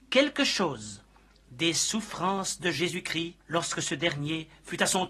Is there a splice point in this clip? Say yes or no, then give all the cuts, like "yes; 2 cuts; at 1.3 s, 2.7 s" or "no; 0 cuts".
yes; 1 cut; at 3.4 s